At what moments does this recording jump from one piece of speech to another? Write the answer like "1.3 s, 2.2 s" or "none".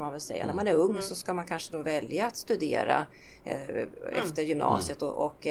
none

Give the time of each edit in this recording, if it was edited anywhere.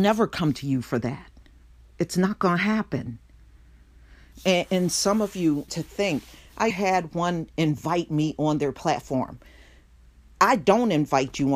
5.7 s, 6.7 s

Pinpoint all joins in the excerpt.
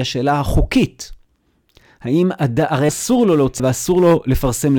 2.9 s, 3.6 s

